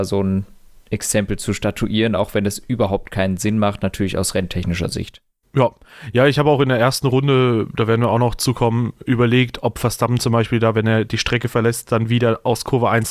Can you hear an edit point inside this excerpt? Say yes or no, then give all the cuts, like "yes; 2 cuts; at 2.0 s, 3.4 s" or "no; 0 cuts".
yes; 1 cut; at 5.4 s